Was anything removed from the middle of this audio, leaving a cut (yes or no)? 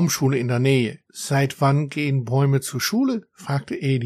yes